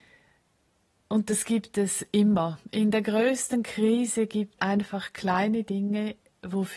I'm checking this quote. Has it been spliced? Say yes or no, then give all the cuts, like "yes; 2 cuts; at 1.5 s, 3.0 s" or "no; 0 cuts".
yes; 1 cut; at 4.6 s